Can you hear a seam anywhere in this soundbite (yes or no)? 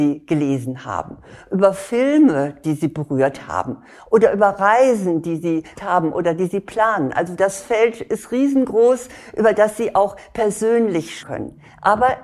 yes